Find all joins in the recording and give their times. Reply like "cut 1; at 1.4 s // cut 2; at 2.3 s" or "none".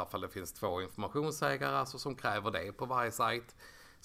none

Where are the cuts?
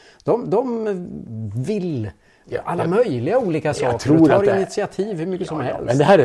none

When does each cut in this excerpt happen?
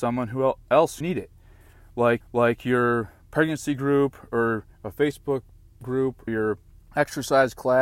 cut 1; at 1.0 s // cut 2; at 2.2 s // cut 3; at 4.7 s // cut 4; at 6.3 s // cut 5; at 6.8 s

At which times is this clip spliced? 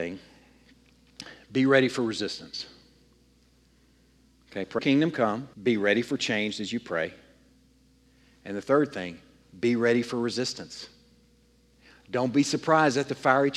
cut 1; at 4.8 s // cut 2; at 5.5 s

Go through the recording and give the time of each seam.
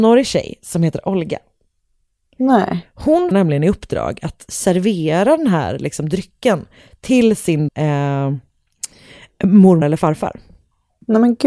cut 1; at 3.3 s // cut 2; at 7.7 s // cut 3; at 9.8 s

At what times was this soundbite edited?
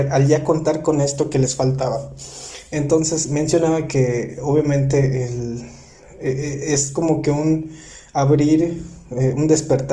none

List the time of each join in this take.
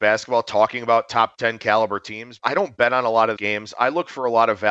cut 1; at 2.4 s // cut 2; at 3.4 s

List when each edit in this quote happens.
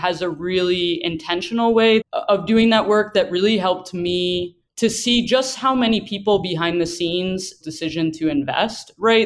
cut 1; at 2.1 s // cut 2; at 4.7 s // cut 3; at 7.6 s

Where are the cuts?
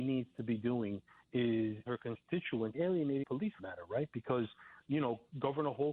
cut 1; at 1.9 s // cut 2; at 2.7 s // cut 3; at 3.2 s // cut 4; at 3.6 s

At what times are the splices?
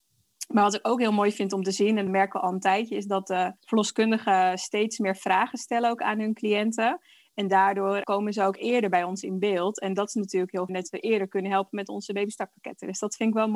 cut 1; at 2.1 s // cut 2; at 3.6 s // cut 3; at 8.0 s // cut 4; at 10.7 s

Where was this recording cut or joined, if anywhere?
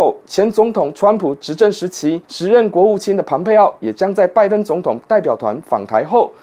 cut 1; at 2.2 s

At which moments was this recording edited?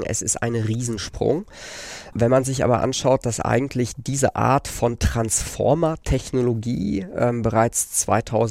none

